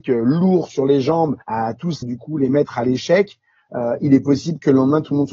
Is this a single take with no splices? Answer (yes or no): no